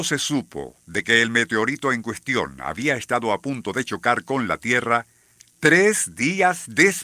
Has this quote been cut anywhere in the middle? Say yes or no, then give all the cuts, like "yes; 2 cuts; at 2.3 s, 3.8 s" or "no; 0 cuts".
no; 0 cuts